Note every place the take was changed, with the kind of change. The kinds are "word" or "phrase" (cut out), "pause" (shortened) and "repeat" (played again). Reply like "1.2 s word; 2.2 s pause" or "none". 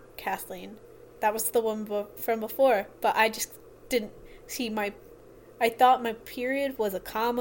none